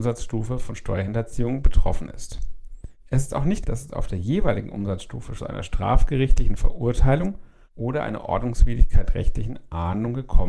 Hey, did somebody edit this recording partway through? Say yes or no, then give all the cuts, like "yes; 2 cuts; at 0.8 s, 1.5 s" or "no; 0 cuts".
yes; 2 cuts; at 3.6 s, 5.4 s